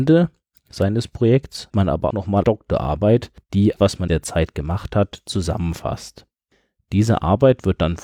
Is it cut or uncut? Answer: cut